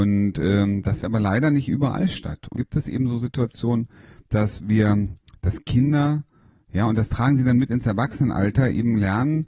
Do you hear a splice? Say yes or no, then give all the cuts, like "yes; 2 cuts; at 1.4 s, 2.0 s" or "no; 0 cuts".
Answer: yes; 2 cuts; at 1.0 s, 2.6 s